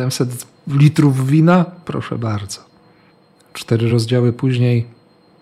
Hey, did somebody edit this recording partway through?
no; 0 cuts

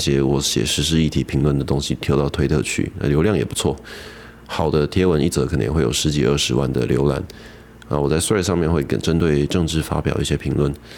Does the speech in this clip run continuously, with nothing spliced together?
yes; 0 cuts

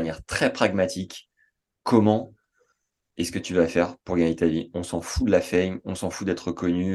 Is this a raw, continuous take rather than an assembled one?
yes; 0 cuts

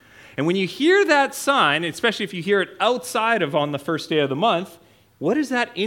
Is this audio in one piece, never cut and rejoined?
yes; 0 cuts

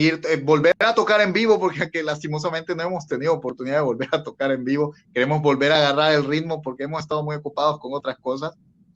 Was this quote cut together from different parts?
no; 0 cuts

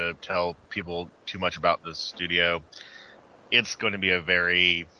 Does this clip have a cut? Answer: no; 0 cuts

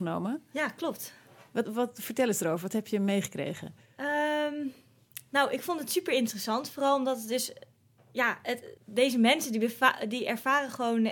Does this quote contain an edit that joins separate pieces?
yes; 2 cuts; at 1.6 s, 8.8 s

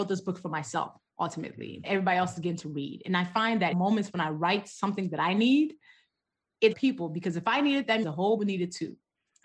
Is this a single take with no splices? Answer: no; 5 cuts; at 1.8 s, 3.7 s, 6.7 s, 8.0 s, 8.4 s

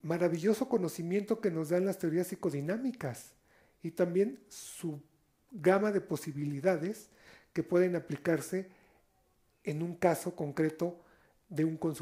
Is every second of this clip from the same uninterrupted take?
yes; 0 cuts

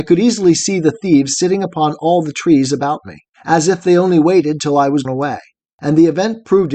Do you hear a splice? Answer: yes; 1 cut; at 5.0 s

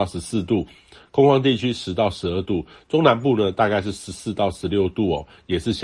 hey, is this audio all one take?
yes; 0 cuts

